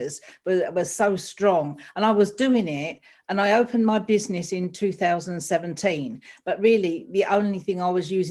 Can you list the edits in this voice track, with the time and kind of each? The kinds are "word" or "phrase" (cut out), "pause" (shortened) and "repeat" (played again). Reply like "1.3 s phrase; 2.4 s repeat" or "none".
none